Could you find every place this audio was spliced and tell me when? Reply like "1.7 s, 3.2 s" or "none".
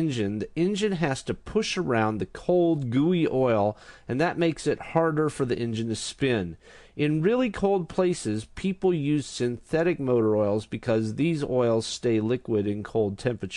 none